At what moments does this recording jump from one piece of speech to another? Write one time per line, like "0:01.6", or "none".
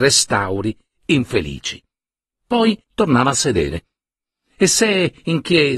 0:02.8